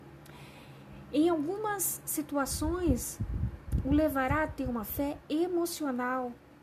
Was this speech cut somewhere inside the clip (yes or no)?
no